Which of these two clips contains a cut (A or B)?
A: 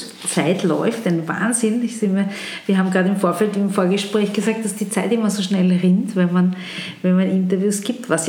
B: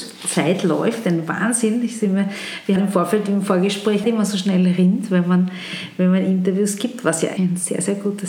B